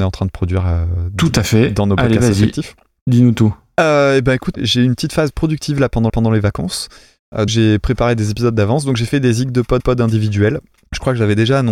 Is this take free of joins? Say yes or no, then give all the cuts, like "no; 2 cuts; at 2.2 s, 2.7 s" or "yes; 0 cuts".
no; 4 cuts; at 4.5 s, 6.1 s, 7.5 s, 9.8 s